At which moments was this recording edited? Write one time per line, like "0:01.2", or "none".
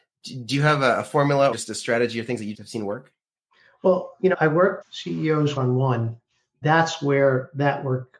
0:01.5
0:02.5
0:04.3
0:04.8
0:05.6
0:06.6